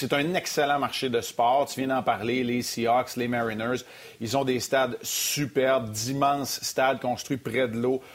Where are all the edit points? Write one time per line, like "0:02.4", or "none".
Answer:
none